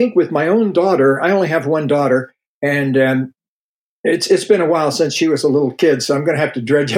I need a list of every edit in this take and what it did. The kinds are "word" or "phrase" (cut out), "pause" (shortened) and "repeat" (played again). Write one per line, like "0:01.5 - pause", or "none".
none